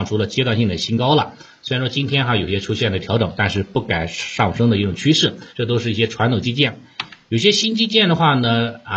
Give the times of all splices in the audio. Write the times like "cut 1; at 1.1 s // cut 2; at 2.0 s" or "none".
cut 1; at 5.5 s